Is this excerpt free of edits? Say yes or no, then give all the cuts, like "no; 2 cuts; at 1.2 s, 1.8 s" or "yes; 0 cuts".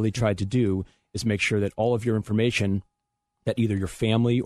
yes; 0 cuts